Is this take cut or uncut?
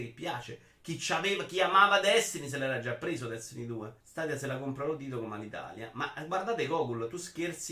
cut